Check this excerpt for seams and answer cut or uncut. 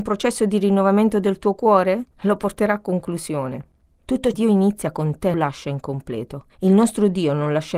cut